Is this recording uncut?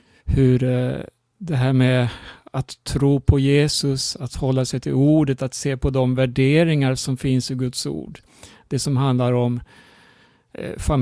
no; 1 cut; at 1.3 s

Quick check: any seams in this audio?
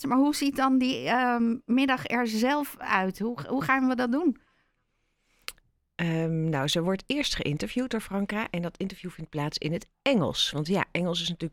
no; 0 cuts

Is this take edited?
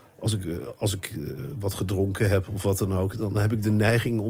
yes; 1 cut; at 3.3 s

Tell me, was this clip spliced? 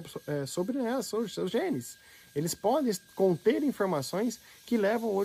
no; 0 cuts

